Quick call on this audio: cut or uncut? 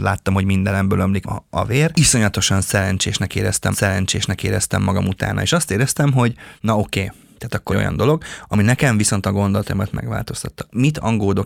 cut